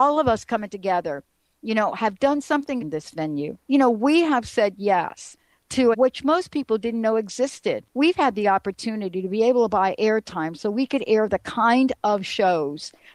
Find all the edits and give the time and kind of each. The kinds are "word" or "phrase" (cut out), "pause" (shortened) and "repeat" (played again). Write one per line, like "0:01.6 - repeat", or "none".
0:02.8 - phrase
0:03.6 - pause
0:05.9 - phrase
0:07.9 - pause